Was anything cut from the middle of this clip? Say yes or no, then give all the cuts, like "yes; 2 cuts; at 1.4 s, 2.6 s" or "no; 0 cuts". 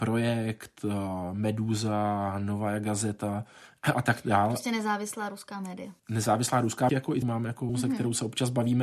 yes; 4 cuts; at 6.0 s, 6.9 s, 7.2 s, 7.7 s